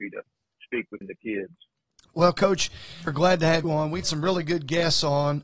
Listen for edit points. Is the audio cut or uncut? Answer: cut